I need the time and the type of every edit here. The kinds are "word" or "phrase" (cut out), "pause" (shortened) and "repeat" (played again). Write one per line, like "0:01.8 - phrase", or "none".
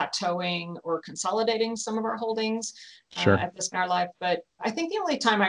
0:03.7 - word
0:04.6 - word